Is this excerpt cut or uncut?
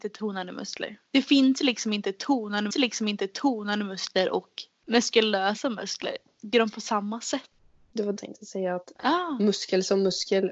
cut